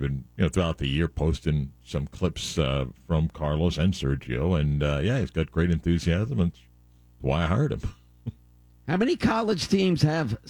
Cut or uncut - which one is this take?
uncut